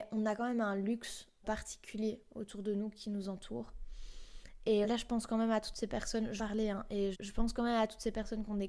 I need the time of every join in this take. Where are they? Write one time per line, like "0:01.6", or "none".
0:01.4
0:04.8
0:06.4
0:07.1